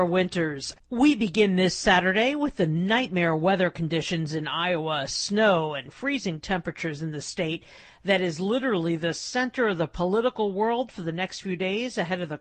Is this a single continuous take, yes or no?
yes